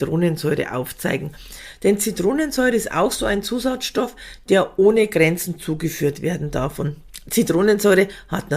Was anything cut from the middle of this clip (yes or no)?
no